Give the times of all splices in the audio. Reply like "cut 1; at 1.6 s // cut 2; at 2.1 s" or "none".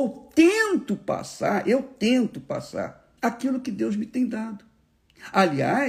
cut 1; at 3.2 s